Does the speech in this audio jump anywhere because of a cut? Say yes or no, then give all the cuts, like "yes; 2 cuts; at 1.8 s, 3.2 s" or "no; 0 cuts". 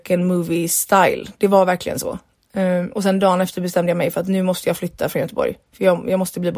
no; 0 cuts